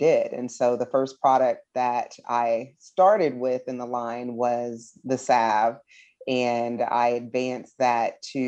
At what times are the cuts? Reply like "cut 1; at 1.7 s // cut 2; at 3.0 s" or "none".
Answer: none